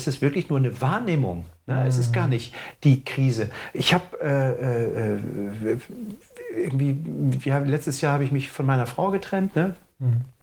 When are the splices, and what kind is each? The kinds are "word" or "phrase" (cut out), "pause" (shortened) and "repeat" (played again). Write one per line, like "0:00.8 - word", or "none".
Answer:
none

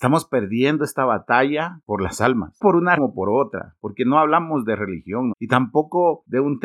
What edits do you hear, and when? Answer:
0:02.6 - word
0:03.0 - word
0:05.3 - word

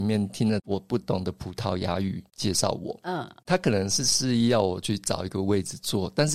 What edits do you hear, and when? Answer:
none

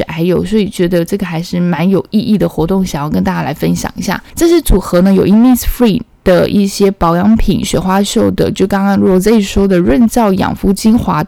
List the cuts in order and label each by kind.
none

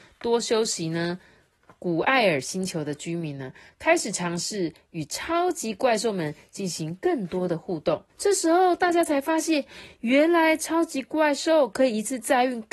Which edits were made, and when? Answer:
0:08.1 - pause

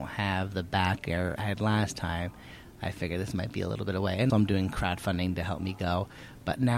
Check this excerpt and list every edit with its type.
0:01.4 - word
0:04.3 - word

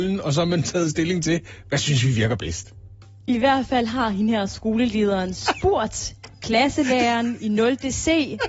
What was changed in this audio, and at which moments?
none

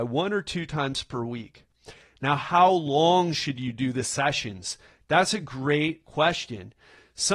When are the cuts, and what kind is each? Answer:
none

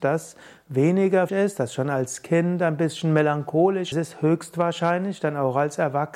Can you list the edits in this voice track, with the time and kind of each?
0:01.3 - word
0:03.9 - phrase

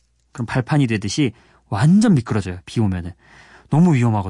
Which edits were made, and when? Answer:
none

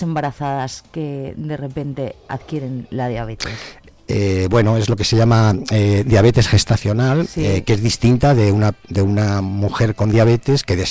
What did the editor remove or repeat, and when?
none

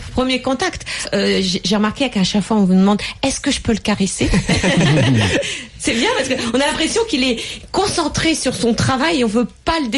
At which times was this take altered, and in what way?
0:01.0 - word

